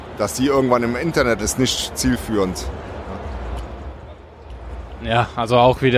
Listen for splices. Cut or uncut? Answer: cut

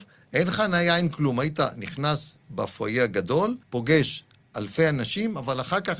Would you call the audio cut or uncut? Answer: cut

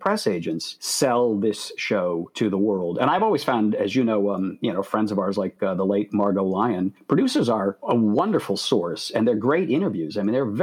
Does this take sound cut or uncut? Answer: uncut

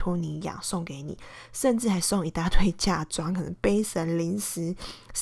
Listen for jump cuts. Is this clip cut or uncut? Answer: uncut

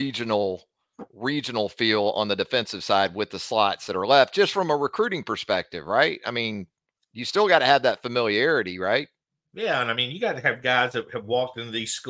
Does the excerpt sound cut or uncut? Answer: uncut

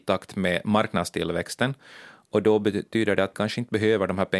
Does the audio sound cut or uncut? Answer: cut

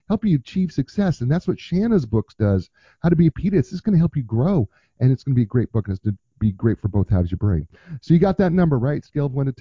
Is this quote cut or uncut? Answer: uncut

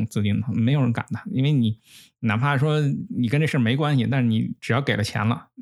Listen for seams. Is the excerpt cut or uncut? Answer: uncut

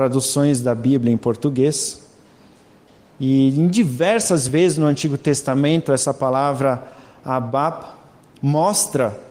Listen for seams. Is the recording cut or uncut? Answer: uncut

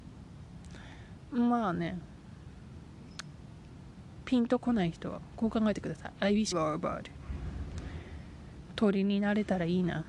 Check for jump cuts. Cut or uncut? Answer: cut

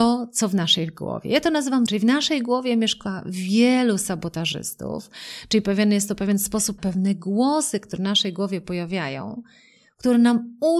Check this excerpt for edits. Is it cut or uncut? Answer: cut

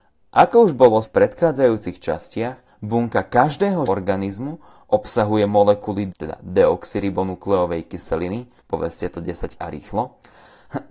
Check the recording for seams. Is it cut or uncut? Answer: cut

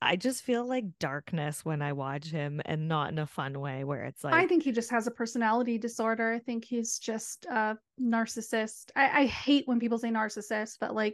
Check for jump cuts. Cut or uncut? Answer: uncut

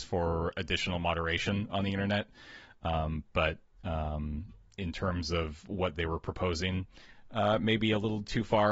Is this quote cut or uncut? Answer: uncut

